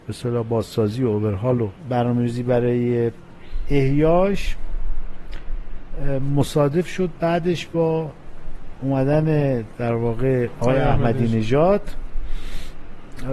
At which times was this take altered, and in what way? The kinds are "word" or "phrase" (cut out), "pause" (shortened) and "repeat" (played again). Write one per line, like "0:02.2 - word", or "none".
0:01.8 - pause